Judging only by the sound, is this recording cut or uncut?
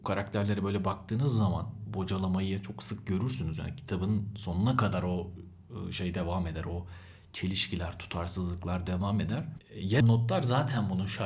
cut